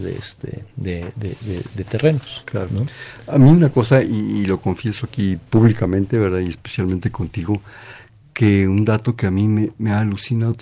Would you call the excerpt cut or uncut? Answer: uncut